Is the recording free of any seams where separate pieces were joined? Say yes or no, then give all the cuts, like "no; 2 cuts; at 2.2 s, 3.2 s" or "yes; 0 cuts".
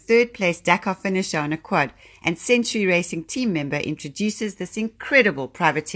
yes; 0 cuts